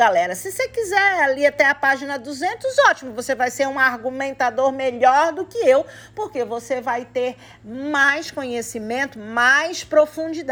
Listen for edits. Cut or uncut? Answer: uncut